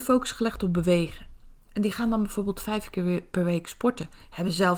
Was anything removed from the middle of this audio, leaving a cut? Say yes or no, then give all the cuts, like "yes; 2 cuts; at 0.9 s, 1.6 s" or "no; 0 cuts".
no; 0 cuts